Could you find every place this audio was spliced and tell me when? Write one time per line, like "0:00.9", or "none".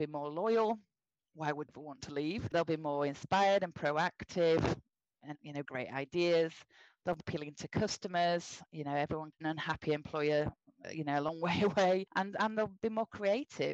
0:01.7
0:05.3
0:05.6
0:07.2
0:09.4
0:10.8